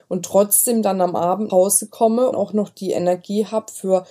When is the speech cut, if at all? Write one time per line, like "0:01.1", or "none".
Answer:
0:01.5
0:02.3